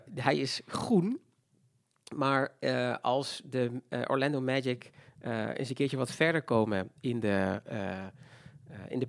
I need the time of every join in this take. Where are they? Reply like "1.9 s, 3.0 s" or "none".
none